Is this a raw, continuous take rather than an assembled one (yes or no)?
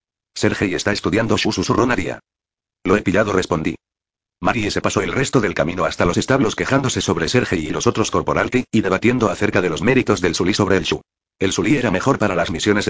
yes